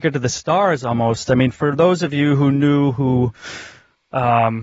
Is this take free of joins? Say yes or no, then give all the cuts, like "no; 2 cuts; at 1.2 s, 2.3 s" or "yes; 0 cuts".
yes; 0 cuts